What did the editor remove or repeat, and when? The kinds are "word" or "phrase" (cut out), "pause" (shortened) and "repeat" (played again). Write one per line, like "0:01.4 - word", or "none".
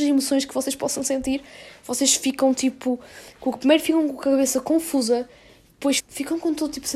0:06.0 - word

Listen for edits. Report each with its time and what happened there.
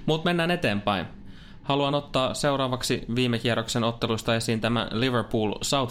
none

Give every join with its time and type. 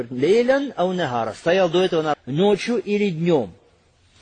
0:02.1 - word

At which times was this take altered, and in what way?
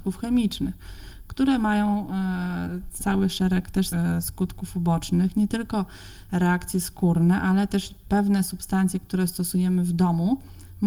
0:03.0 - word
0:03.9 - word

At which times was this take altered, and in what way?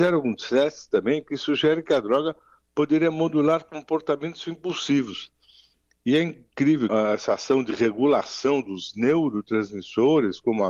0:06.9 - word

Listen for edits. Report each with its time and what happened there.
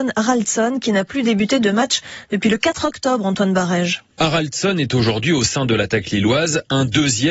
none

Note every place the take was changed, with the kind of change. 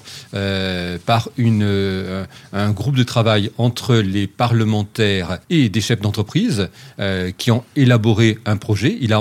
0:05.4 - pause

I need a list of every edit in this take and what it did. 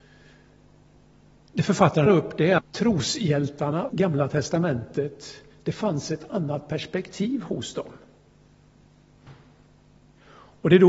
0:02.1 - word
0:02.6 - word
0:03.9 - word

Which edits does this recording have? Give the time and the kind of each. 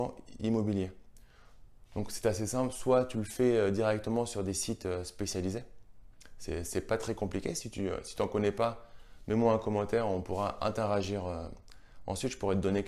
none

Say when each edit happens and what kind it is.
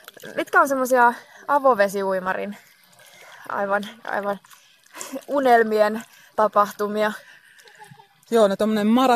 none

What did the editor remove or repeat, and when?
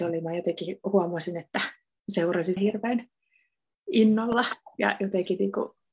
0:02.6 - word

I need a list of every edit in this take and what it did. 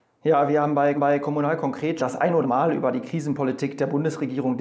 0:00.9 - repeat
0:02.0 - word
0:02.4 - word

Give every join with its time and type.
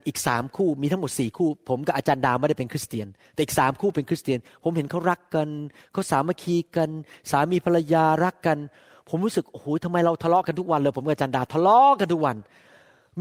none

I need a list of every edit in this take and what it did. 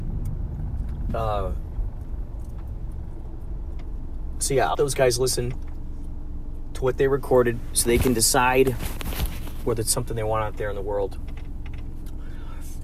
0:04.7 - word

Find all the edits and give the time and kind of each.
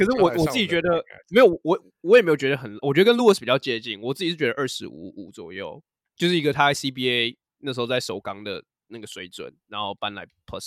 none

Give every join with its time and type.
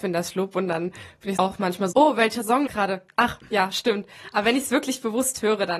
0:01.4 - word
0:01.9 - word
0:02.7 - word

